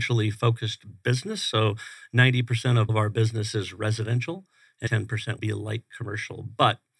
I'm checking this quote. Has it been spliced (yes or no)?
yes